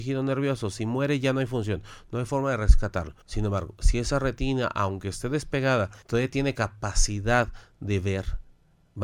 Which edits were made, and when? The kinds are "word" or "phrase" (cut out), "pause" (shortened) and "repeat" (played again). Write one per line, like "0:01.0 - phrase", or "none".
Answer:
0:03.2 - pause
0:06.0 - pause